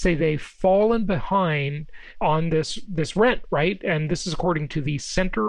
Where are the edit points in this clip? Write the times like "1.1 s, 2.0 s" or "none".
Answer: none